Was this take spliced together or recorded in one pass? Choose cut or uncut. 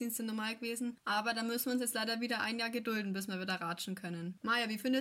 uncut